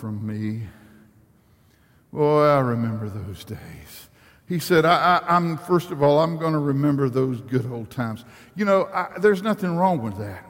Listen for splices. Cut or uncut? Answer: uncut